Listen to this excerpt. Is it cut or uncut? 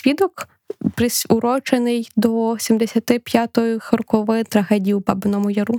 uncut